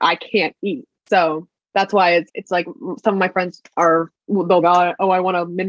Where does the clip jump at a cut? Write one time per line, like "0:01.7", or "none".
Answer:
0:02.3
0:04.6